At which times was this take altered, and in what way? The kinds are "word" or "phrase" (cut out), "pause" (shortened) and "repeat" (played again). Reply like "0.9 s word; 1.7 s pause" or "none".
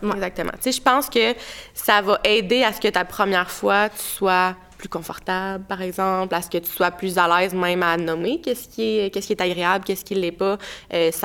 none